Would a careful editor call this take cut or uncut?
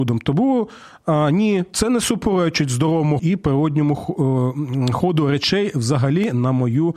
cut